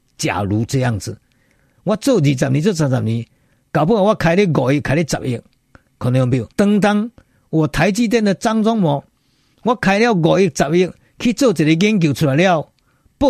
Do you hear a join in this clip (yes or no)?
yes